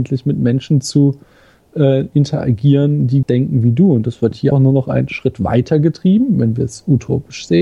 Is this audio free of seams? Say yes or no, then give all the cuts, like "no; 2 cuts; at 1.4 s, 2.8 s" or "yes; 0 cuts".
no; 2 cuts; at 3.2 s, 4.5 s